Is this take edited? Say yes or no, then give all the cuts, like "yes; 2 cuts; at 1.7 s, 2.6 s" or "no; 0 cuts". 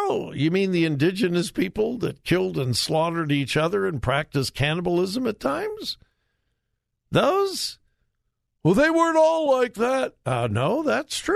no; 0 cuts